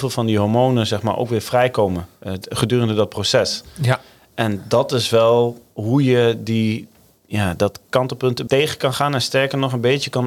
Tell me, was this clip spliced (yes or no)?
yes